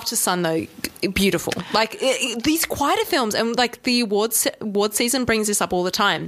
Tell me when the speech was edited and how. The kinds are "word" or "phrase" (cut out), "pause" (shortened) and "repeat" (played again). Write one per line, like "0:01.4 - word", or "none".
none